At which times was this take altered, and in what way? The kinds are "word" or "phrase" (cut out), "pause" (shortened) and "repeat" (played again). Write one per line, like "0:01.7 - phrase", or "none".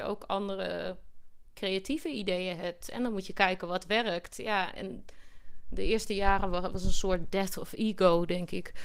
none